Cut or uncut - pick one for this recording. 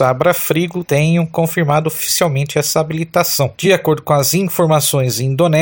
uncut